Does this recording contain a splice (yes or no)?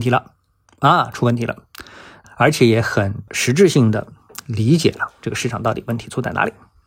no